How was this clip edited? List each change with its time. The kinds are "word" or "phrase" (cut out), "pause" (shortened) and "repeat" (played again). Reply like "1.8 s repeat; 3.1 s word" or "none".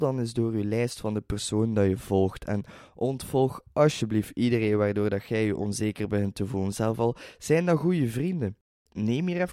none